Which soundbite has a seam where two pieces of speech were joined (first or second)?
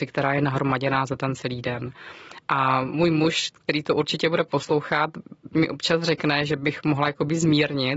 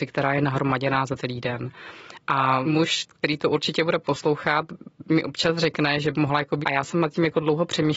second